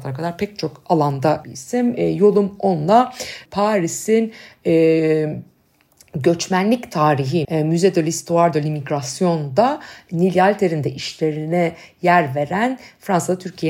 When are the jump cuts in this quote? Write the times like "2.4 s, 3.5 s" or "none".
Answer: 1.4 s, 3.5 s, 7.4 s